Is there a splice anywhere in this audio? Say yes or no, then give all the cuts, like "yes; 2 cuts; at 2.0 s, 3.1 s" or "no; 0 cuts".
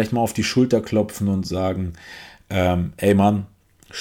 no; 0 cuts